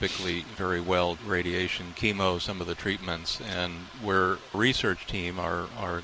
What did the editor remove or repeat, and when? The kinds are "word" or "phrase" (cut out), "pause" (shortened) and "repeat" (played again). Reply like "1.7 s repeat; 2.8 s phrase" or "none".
1.2 s word; 2.8 s word; 4.5 s word